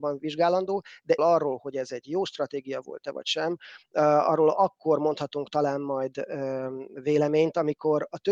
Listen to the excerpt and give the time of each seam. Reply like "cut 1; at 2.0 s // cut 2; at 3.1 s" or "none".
cut 1; at 1.2 s